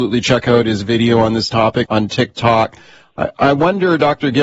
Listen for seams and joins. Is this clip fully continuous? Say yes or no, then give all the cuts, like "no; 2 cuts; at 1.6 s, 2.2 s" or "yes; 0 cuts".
no; 1 cut; at 1.9 s